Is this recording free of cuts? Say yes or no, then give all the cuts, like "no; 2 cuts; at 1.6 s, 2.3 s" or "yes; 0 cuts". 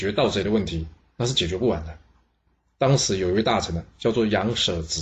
yes; 0 cuts